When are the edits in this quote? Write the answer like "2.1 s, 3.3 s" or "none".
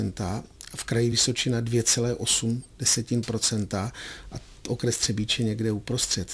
none